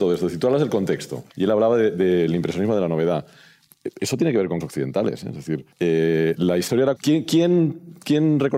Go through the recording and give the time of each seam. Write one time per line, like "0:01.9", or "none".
0:01.3
0:04.6
0:05.7
0:07.0